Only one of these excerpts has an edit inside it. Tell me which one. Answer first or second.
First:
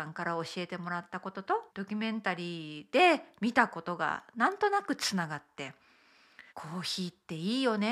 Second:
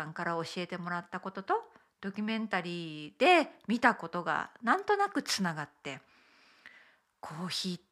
first